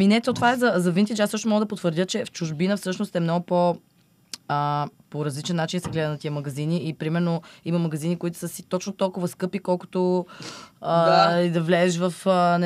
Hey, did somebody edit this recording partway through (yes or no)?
no